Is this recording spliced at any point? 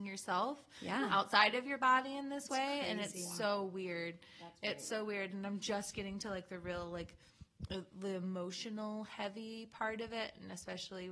no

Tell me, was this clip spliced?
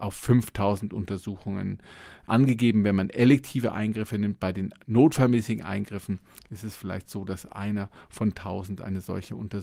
no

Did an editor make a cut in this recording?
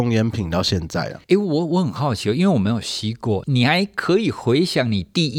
yes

